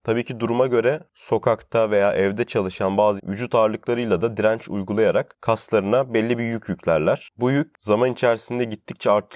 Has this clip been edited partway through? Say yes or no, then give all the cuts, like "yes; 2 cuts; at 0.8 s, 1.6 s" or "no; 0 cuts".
yes; 1 cut; at 3.2 s